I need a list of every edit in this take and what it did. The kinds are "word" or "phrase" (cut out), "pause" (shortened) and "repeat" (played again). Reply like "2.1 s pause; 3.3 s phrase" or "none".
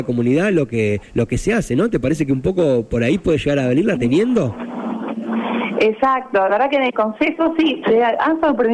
1.0 s pause; 4.0 s phrase; 6.5 s word; 7.8 s word